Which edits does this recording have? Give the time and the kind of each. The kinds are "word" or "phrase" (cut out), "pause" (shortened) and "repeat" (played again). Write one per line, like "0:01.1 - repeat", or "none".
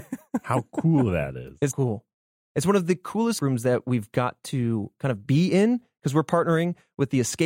0:01.7 - word
0:03.4 - word